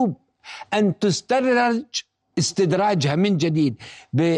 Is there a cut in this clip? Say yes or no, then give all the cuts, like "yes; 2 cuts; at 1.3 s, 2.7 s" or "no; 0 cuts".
no; 0 cuts